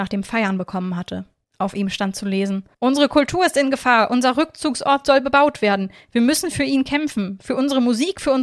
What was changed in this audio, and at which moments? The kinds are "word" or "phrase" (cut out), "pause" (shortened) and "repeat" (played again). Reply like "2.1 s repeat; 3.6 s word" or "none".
1.4 s pause; 2.7 s pause